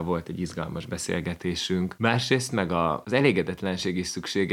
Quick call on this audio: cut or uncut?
uncut